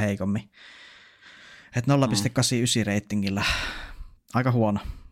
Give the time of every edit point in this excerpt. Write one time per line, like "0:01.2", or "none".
0:04.2